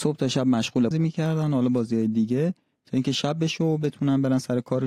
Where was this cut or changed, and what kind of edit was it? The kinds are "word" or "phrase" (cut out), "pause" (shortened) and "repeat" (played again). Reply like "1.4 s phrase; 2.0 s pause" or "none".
0.9 s phrase